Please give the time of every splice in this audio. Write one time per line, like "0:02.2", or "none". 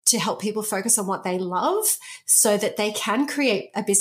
none